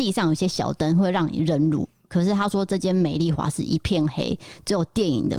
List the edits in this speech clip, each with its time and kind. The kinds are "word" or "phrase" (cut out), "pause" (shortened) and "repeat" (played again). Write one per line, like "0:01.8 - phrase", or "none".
none